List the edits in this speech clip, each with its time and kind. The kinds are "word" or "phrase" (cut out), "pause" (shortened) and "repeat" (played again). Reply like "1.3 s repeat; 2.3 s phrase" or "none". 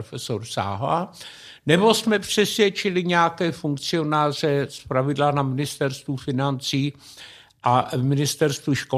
none